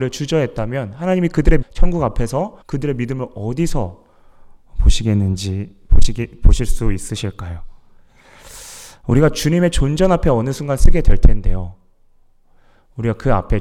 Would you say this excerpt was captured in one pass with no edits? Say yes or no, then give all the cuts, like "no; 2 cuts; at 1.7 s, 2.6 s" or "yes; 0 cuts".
no; 2 cuts; at 1.6 s, 2.6 s